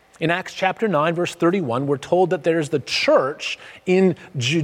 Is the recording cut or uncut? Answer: uncut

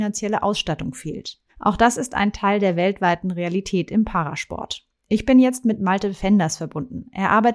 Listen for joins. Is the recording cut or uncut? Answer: cut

